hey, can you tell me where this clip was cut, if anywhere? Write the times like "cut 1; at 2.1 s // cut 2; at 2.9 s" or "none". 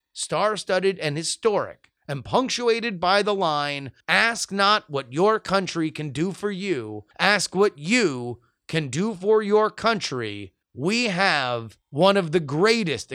cut 1; at 2.0 s // cut 2; at 4.0 s // cut 3; at 7.1 s // cut 4; at 10.6 s // cut 5; at 11.8 s